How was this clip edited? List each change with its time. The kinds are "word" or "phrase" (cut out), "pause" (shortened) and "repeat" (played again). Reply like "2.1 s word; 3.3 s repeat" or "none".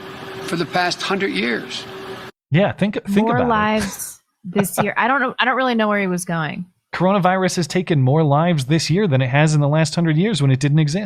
2.4 s pause